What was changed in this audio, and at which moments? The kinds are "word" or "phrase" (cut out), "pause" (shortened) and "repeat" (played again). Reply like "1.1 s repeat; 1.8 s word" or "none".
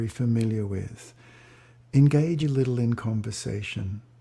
2.4 s word